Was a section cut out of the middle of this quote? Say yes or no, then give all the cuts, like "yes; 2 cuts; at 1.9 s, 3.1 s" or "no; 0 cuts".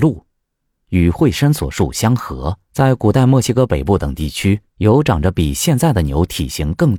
yes; 2 cuts; at 2.6 s, 4.7 s